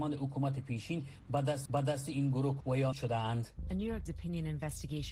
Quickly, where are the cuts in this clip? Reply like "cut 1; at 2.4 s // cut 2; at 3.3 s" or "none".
cut 1; at 1.7 s // cut 2; at 2.6 s // cut 3; at 2.9 s // cut 4; at 4.1 s